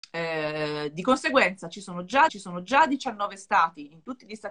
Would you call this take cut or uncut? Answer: cut